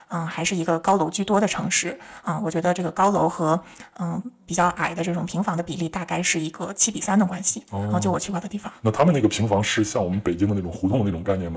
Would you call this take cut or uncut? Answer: uncut